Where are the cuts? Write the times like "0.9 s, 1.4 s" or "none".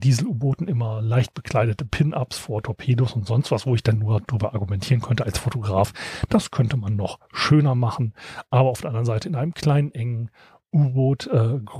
none